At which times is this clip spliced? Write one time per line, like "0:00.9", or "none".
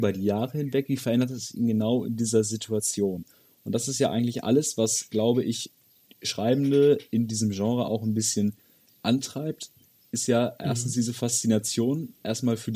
none